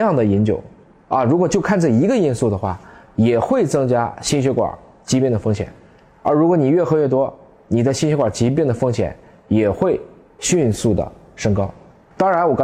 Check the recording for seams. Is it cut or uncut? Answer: uncut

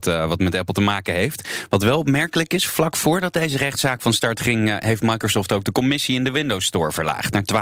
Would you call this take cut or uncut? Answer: uncut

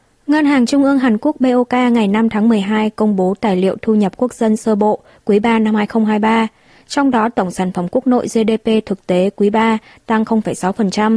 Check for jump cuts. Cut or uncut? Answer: uncut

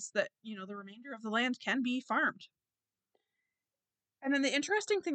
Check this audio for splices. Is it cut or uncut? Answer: uncut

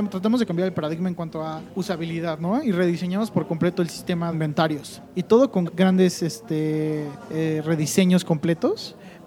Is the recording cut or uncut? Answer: cut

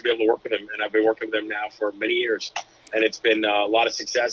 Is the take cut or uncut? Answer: uncut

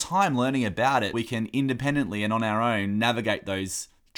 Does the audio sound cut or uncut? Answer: cut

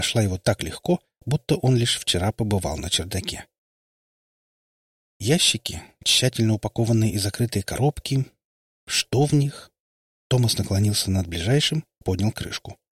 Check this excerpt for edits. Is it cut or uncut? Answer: uncut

